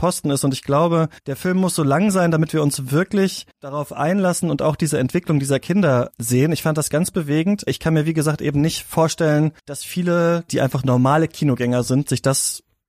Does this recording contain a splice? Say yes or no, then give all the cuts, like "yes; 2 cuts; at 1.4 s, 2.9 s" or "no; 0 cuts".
yes; 6 cuts; at 1.2 s, 3.5 s, 6.1 s, 7.7 s, 9.6 s, 10.5 s